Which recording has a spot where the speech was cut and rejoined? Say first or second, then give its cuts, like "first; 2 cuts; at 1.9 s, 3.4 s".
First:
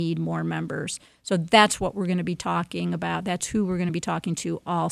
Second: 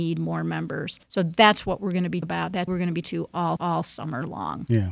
second; 5 cuts; at 1.0 s, 2.2 s, 2.7 s, 3.0 s, 3.6 s